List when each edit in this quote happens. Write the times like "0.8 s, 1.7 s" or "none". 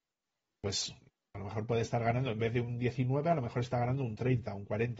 none